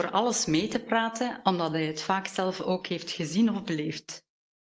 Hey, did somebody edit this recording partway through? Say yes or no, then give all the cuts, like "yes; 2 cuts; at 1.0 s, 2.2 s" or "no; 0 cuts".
no; 0 cuts